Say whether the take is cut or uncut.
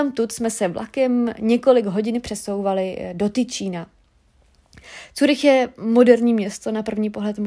uncut